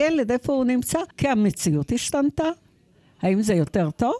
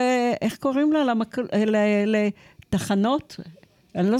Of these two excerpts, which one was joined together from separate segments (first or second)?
first